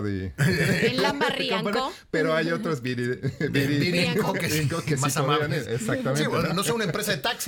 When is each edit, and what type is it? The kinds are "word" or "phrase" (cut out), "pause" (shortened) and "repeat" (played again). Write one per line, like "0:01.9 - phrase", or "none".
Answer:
none